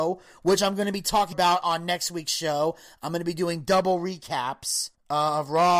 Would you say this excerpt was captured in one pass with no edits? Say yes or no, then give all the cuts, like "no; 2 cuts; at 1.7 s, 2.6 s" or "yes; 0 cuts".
no; 1 cut; at 1.3 s